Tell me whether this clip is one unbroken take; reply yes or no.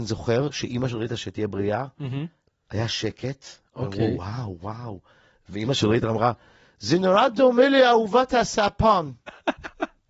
yes